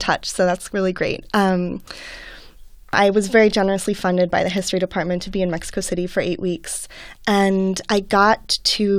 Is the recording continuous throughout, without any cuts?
yes; 0 cuts

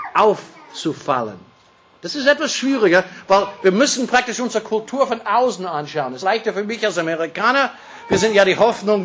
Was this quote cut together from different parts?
yes; 1 cut; at 6.2 s

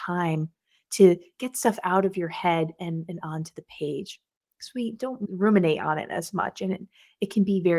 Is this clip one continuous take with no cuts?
yes; 0 cuts

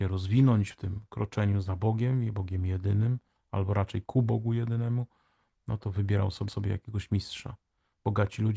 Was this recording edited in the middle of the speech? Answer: yes; 1 cut; at 6.5 s

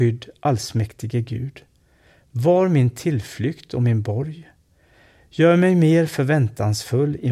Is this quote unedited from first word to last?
yes; 0 cuts

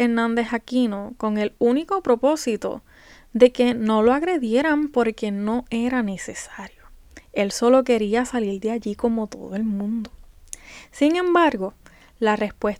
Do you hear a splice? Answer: no; 0 cuts

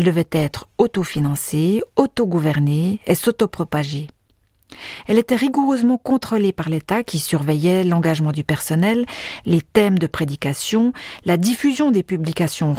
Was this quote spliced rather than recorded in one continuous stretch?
no; 0 cuts

